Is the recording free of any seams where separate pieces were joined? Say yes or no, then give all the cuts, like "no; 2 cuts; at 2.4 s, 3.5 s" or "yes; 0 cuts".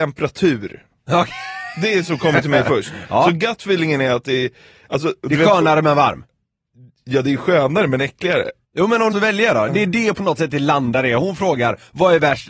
no; 3 cuts; at 8.6 s, 9.1 s, 9.7 s